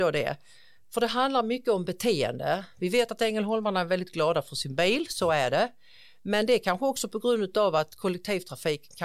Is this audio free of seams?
yes; 0 cuts

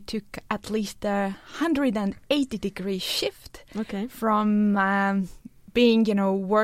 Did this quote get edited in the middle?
no; 0 cuts

